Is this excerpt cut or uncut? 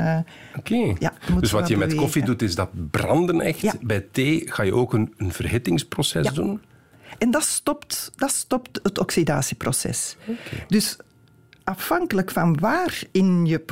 uncut